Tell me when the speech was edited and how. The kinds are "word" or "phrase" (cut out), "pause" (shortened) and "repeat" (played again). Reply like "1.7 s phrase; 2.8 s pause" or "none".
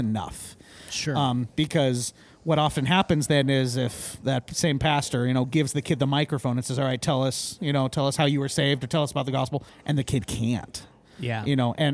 9.7 s pause